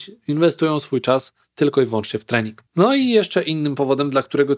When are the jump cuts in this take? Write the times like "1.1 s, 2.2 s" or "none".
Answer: 2.7 s